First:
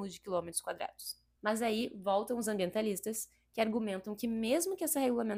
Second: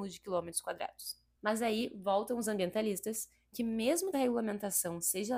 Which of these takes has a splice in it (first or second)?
second